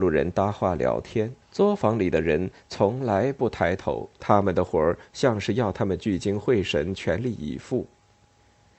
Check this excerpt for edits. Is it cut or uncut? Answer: cut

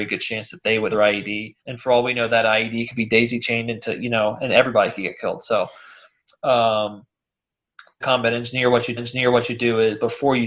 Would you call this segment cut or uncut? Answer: cut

